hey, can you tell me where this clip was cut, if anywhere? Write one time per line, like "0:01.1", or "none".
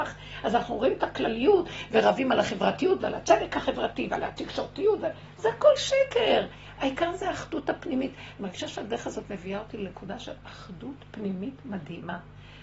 none